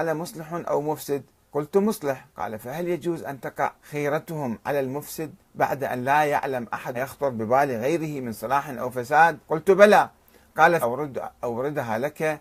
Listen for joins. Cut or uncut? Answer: cut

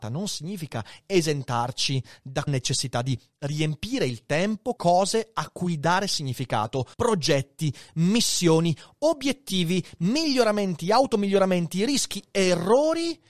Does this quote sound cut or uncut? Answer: cut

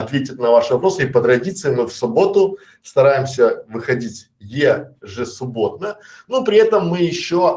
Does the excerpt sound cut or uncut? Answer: uncut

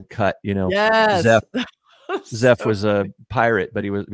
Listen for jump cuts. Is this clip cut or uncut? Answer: uncut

